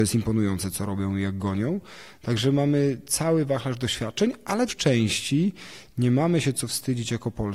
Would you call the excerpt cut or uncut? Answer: cut